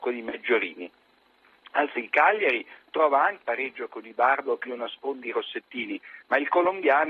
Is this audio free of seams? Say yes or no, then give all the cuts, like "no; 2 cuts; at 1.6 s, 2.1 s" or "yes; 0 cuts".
no; 4 cuts; at 1.9 s, 3.4 s, 4.7 s, 5.2 s